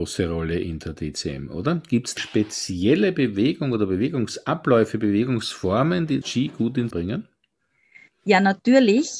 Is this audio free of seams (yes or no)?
no